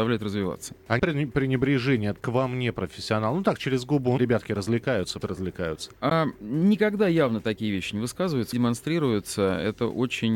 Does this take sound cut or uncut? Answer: cut